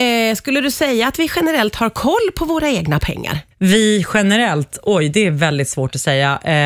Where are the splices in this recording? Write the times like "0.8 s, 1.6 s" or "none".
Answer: 3.5 s